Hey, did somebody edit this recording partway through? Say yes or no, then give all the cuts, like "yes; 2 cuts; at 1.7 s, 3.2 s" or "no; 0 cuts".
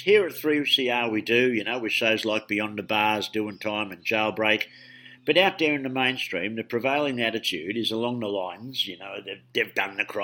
no; 0 cuts